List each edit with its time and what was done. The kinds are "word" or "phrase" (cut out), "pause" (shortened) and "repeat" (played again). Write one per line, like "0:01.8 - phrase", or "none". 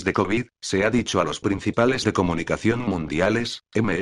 0:02.0 - word